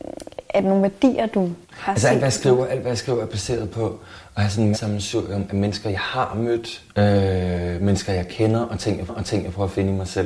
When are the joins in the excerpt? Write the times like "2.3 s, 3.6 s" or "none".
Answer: 1.6 s, 4.7 s, 6.9 s, 9.1 s

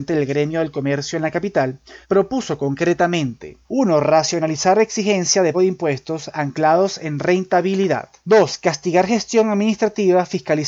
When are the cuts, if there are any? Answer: 2.0 s, 3.6 s, 5.5 s, 8.2 s

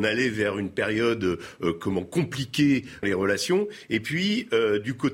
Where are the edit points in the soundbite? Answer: 3.0 s

